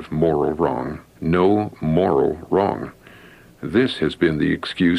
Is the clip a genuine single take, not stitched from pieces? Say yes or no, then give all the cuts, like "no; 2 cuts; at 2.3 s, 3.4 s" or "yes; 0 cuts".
no; 1 cut; at 1.1 s